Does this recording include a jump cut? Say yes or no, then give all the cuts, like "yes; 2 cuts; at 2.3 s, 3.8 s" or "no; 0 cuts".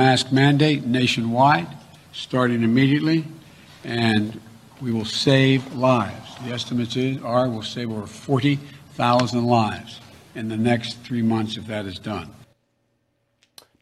no; 0 cuts